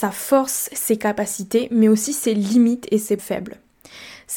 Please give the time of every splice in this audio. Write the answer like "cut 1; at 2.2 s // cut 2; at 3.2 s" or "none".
cut 1; at 3.2 s